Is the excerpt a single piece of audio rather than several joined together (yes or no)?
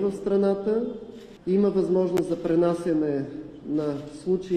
yes